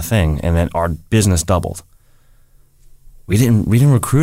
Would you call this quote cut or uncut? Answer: uncut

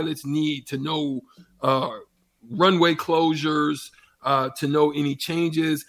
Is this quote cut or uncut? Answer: uncut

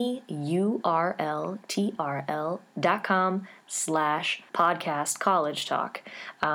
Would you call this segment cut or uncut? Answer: cut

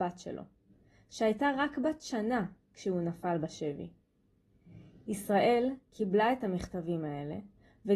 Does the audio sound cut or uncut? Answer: uncut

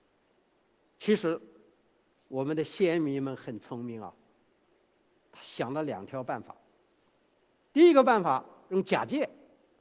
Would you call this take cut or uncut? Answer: uncut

